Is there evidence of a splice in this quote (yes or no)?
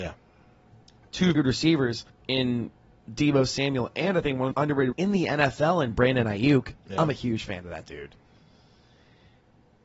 yes